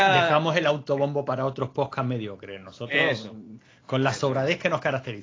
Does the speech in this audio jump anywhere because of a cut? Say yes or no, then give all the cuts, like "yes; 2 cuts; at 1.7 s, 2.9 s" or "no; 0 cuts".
no; 0 cuts